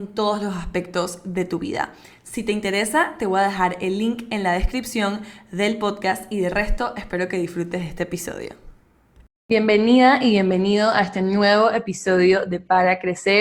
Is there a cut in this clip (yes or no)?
no